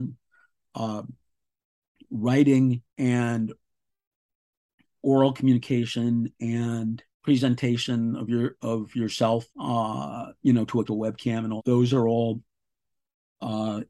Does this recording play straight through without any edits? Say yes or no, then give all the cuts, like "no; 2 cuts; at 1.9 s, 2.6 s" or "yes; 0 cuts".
no; 5 cuts; at 2.9 s, 7.1 s, 9.5 s, 10.9 s, 11.6 s